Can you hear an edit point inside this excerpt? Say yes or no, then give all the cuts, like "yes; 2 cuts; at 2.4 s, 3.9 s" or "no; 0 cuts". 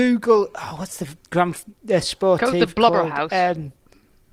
yes; 1 cut; at 1.2 s